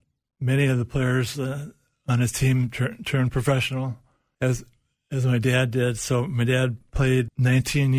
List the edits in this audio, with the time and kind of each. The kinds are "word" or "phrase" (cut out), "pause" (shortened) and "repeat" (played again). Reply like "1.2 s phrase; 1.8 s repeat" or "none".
none